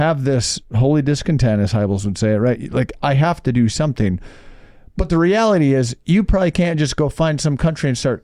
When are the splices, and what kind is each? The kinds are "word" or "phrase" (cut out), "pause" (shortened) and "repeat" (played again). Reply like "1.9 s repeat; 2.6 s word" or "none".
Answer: none